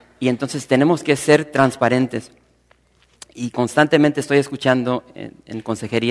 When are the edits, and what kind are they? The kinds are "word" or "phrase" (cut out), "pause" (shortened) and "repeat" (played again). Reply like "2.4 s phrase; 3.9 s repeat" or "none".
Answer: none